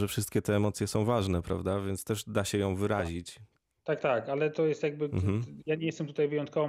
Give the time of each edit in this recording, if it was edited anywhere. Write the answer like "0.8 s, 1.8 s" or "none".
4.0 s